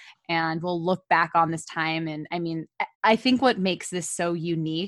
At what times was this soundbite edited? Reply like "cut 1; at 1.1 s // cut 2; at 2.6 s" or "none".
cut 1; at 2.9 s